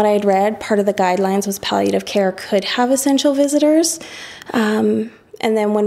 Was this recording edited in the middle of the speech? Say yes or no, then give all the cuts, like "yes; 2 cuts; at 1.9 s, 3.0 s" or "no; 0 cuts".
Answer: no; 0 cuts